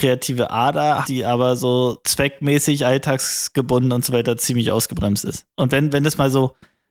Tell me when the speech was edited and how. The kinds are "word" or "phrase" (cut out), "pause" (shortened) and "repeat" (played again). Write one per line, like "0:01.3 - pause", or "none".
0:01.0 - word
0:02.0 - word
0:05.5 - pause